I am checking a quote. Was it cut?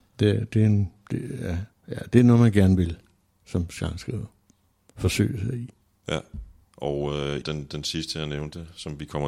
yes; 2 cuts; at 6.6 s, 7.4 s

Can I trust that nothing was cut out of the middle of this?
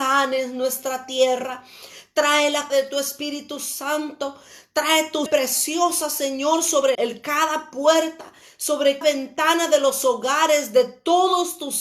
no; 4 cuts; at 2.7 s, 5.3 s, 6.9 s, 9.0 s

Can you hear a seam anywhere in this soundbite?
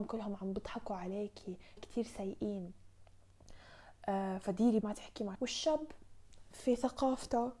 yes; 3 cuts; at 1.8 s, 4.8 s, 5.3 s

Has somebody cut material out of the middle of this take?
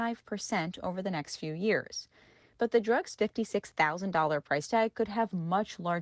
no; 0 cuts

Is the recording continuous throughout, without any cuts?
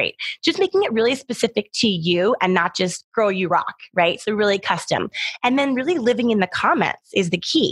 yes; 0 cuts

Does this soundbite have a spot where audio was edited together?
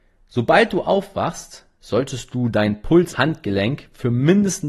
yes; 1 cut; at 3.1 s

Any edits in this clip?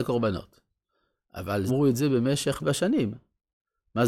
yes; 2 cuts; at 1.7 s, 2.6 s

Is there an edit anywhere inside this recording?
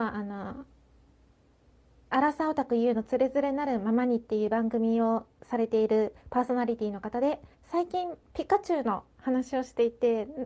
yes; 3 cuts; at 6.2 s, 7.5 s, 8.2 s

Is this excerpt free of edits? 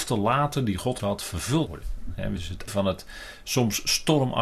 no; 4 cuts; at 1.0 s, 1.7 s, 2.4 s, 2.7 s

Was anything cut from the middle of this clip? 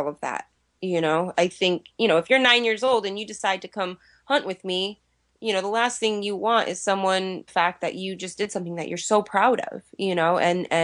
yes; 1 cut; at 7.5 s

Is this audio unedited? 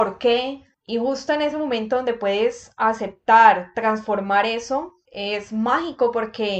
yes; 0 cuts

